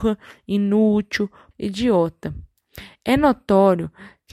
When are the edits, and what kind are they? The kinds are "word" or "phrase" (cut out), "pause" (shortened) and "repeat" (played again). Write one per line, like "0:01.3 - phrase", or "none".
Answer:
0:01.5 - word